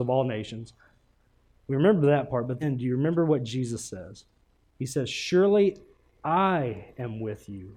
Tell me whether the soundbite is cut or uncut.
cut